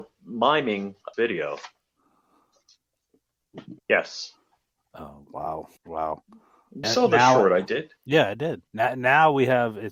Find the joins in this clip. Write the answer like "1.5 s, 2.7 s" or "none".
1.1 s, 3.8 s, 5.8 s, 6.8 s, 8.0 s, 8.7 s